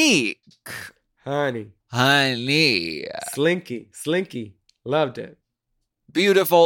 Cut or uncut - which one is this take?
cut